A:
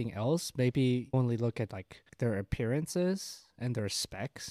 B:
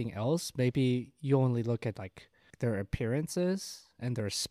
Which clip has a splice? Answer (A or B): A